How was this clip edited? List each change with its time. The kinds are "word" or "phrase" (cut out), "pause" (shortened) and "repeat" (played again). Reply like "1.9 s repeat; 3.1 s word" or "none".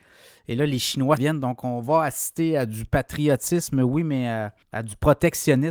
1.2 s word; 4.6 s pause